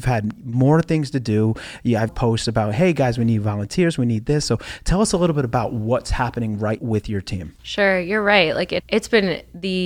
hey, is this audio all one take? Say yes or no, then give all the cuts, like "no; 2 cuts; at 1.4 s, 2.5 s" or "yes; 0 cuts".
no; 4 cuts; at 2.1 s, 6.8 s, 7.6 s, 8.8 s